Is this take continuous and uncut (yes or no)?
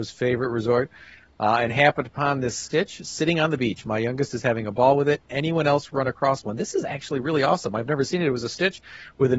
yes